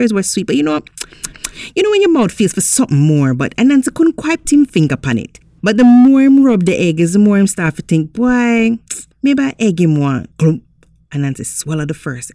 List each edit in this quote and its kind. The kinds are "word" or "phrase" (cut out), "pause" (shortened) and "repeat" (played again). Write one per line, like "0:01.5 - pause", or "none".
0:04.4 - word
0:10.3 - pause